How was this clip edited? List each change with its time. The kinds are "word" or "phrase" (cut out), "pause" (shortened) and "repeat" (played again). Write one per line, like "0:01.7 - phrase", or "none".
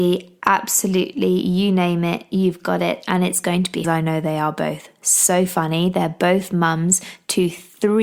0:03.8 - phrase